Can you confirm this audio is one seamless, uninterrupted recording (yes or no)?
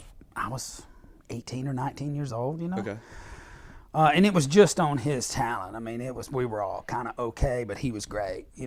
yes